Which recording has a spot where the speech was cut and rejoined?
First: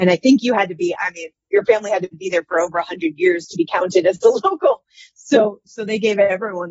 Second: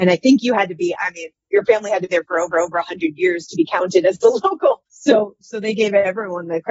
second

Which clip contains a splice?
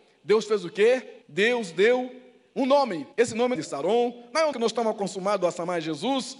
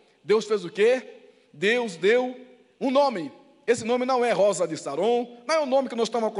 first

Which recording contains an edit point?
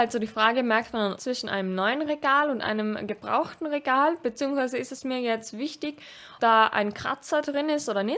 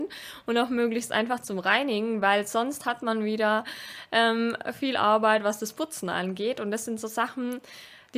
first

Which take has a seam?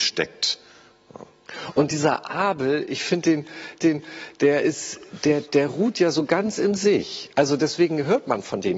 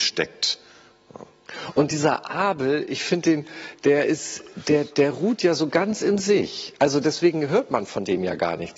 first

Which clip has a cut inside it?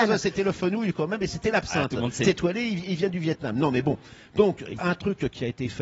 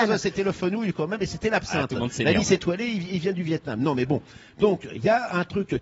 first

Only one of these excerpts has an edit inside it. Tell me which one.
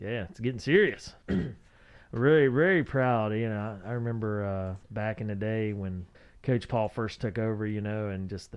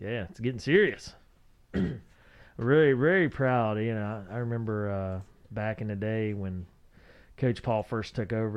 first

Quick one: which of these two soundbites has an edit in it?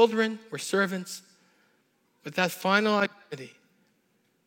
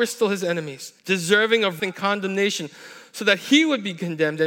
second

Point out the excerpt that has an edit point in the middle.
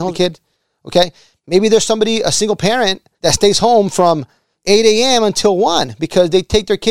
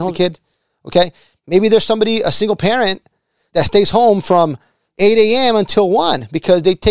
first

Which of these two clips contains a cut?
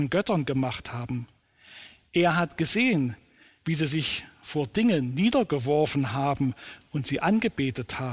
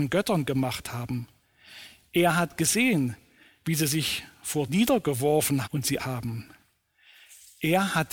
second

